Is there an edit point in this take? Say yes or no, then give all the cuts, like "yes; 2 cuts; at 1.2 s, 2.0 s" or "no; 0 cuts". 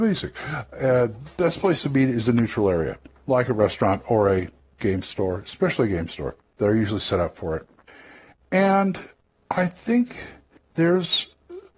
no; 0 cuts